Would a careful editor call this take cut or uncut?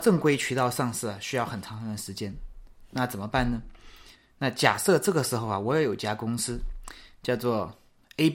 cut